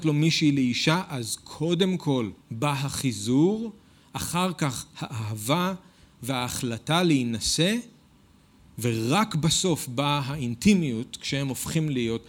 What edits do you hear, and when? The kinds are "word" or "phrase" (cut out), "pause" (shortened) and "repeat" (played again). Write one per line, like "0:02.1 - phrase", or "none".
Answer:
0:02.4 - pause

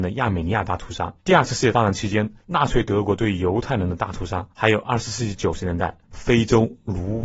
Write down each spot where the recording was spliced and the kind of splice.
0:01.2 - pause
0:02.4 - pause
0:04.5 - pause
0:06.0 - pause

